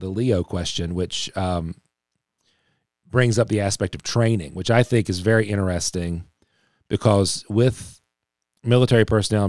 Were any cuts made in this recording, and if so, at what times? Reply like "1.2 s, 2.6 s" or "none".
none